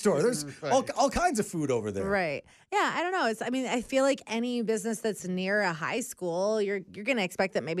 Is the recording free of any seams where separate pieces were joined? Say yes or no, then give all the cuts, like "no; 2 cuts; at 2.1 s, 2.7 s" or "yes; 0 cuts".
yes; 0 cuts